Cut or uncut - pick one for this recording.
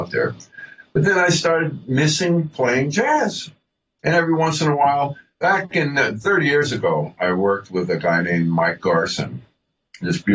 uncut